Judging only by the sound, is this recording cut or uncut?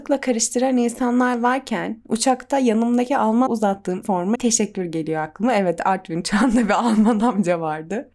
cut